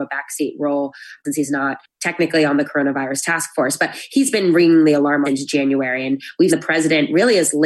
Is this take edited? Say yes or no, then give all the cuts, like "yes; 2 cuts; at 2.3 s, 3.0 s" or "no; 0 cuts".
yes; 2 cuts; at 5.2 s, 6.5 s